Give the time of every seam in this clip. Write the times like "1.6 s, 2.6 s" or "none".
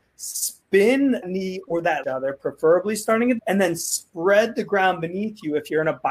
1.2 s, 2.0 s, 3.4 s